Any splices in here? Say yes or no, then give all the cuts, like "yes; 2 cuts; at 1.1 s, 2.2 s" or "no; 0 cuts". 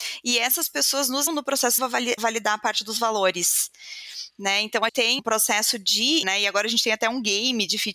yes; 6 cuts; at 1.3 s, 1.8 s, 2.2 s, 4.9 s, 5.2 s, 6.2 s